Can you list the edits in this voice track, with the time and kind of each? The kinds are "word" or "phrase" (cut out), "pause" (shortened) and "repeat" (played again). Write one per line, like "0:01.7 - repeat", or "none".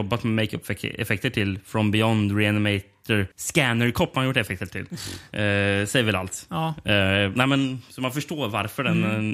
0:03.3 - pause